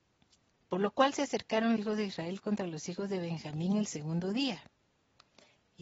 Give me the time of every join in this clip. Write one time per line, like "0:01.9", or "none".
0:01.8

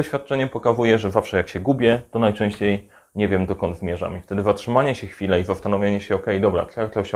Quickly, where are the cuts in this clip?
none

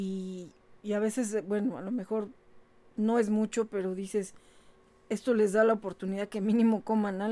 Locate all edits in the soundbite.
none

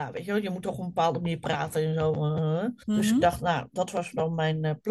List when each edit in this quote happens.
0:02.8

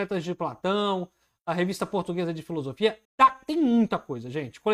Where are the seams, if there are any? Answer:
0:03.0

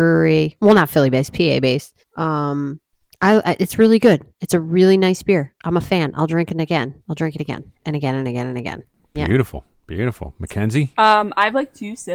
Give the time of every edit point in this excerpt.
0:02.0
0:07.7

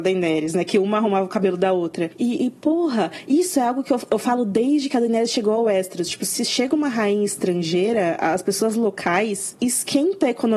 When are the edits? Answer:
none

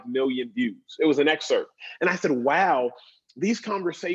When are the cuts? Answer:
none

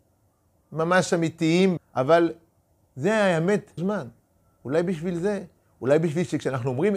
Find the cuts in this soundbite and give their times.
0:01.8
0:03.8
0:04.2

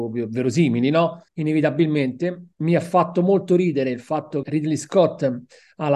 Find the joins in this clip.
0:01.3
0:04.4

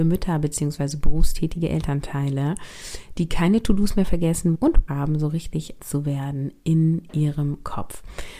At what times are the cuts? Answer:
0:04.5
0:04.9
0:05.8

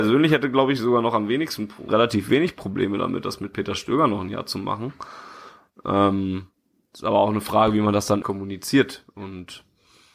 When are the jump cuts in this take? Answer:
0:01.9
0:08.2

